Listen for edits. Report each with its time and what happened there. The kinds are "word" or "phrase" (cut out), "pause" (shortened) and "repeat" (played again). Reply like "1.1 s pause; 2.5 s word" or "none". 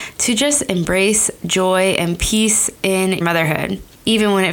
3.2 s word